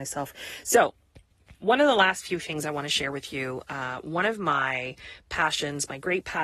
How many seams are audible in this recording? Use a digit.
0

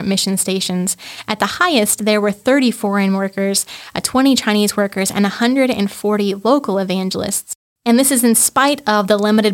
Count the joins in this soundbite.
1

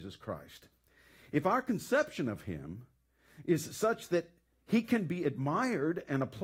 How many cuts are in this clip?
0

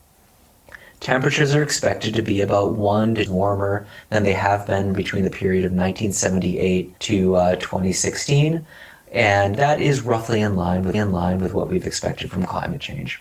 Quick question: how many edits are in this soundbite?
4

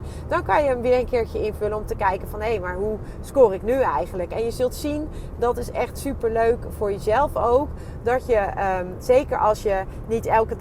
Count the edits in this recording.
0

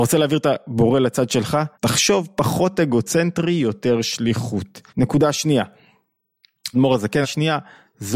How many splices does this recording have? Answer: 4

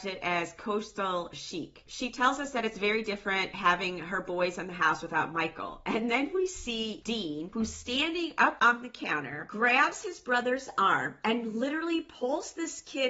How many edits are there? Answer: 0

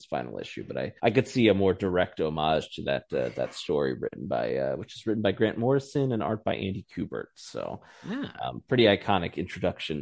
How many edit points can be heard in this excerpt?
1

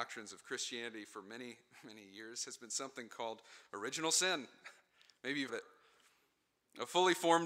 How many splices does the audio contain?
1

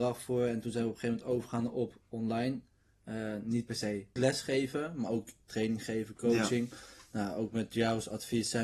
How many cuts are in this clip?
1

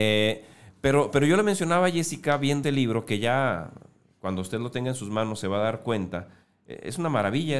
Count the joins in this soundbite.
1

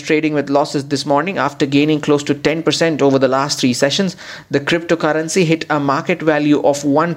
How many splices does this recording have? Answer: 0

